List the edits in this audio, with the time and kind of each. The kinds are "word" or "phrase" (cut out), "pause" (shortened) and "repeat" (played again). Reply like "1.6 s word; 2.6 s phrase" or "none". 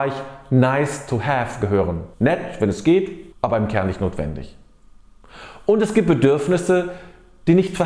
2.1 s pause; 3.3 s pause